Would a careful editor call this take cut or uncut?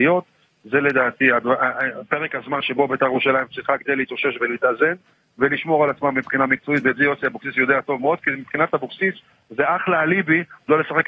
uncut